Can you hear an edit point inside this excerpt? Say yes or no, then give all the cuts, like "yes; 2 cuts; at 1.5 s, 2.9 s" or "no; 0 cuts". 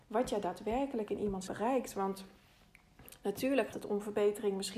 yes; 2 cuts; at 1.5 s, 3.7 s